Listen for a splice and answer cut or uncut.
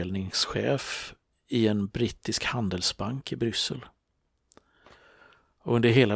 uncut